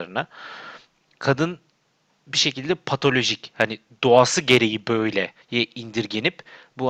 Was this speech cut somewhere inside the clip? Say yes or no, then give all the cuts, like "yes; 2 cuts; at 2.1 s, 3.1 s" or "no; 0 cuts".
yes; 1 cut; at 5.4 s